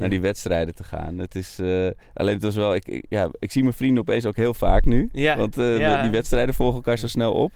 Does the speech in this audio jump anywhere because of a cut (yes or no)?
yes